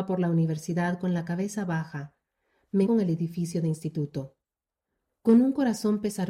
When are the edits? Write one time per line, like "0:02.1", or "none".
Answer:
0:02.9